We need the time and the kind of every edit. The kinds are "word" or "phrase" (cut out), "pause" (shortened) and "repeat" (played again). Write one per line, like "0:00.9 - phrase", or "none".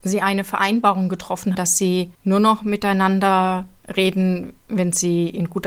0:01.5 - word
0:02.1 - pause